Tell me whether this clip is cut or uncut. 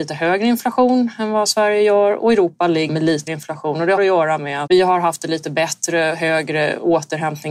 cut